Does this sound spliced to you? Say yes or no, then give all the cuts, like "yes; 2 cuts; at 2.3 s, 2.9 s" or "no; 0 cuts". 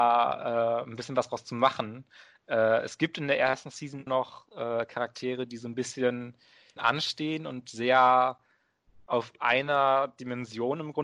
yes; 2 cuts; at 4.1 s, 6.8 s